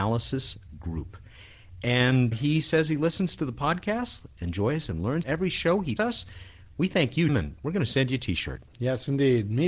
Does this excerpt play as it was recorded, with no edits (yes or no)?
no